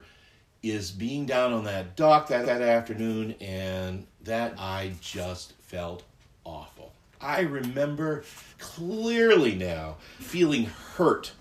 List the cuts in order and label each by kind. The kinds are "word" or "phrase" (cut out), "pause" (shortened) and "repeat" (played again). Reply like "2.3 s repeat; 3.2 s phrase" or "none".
2.4 s repeat; 4.5 s word; 5.6 s pause; 7.0 s pause; 8.5 s pause; 10.2 s word